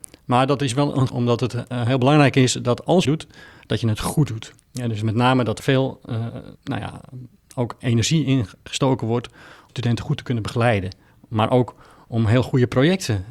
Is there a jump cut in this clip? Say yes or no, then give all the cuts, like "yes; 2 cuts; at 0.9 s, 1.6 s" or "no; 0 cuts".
yes; 6 cuts; at 1.1 s, 3.0 s, 4.6 s, 5.6 s, 6.5 s, 9.7 s